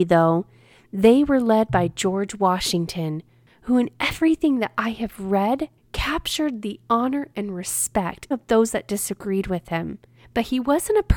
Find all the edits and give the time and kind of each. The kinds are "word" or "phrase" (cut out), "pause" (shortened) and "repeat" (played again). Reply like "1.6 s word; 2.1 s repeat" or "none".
8.3 s word